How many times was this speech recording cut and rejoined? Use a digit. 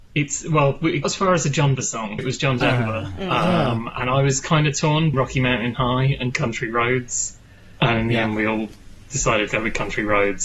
5